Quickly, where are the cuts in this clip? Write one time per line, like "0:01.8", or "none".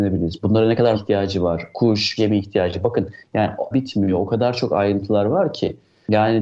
0:00.9
0:02.2
0:03.7